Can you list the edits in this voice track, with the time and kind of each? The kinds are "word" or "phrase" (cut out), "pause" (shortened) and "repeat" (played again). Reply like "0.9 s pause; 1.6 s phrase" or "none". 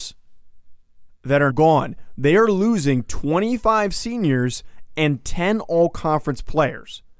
1.5 s word